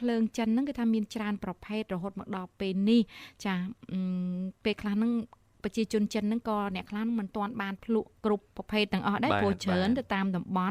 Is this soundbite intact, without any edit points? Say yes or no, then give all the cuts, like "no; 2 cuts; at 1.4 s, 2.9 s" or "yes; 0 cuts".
no; 1 cut; at 8.2 s